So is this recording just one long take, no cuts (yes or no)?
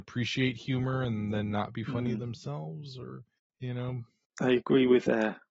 yes